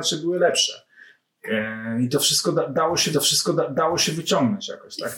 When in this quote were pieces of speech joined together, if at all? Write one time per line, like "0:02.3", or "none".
0:03.1